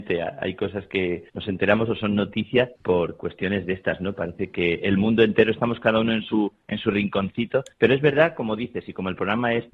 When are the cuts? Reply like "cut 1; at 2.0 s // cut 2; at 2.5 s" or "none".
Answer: cut 1; at 1.3 s // cut 2; at 2.8 s // cut 3; at 7.7 s